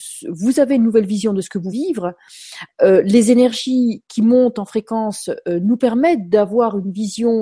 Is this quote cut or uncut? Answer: cut